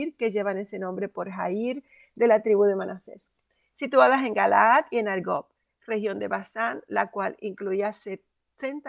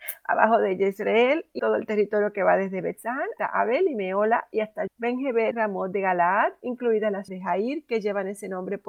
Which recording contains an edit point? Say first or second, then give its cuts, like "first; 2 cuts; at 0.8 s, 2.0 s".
second; 5 cuts; at 1.6 s, 3.4 s, 4.9 s, 5.5 s, 7.3 s